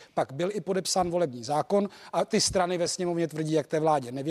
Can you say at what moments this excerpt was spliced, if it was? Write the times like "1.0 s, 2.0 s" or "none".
none